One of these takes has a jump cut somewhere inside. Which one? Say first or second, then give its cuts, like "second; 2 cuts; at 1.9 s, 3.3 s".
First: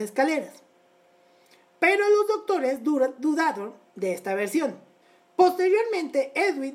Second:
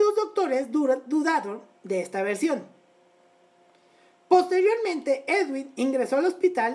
first; 1 cut; at 5.0 s